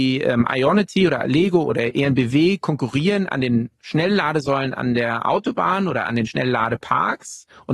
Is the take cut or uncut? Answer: uncut